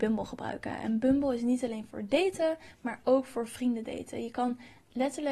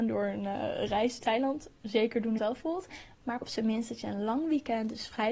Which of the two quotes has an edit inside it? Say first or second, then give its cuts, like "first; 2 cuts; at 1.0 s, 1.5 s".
second; 3 cuts; at 1.2 s, 2.4 s, 3.4 s